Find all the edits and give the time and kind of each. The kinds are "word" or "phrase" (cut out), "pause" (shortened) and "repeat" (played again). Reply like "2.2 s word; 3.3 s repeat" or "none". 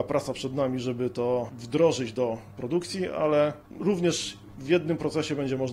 none